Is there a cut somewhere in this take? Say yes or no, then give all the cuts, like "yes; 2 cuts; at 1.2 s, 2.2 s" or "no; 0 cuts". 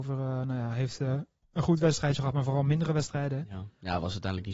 no; 0 cuts